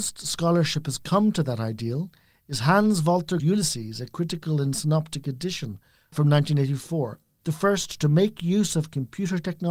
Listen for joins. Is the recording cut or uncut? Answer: cut